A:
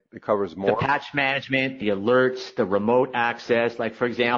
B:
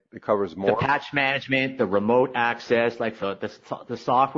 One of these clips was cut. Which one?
B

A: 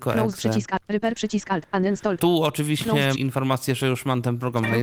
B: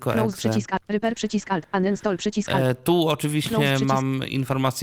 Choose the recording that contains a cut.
A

